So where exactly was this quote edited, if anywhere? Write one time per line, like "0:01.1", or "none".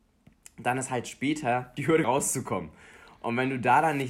0:02.0